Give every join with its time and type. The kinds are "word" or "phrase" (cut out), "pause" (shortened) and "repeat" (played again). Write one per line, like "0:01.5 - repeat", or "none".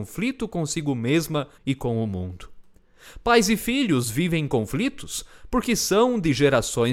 0:01.5 - pause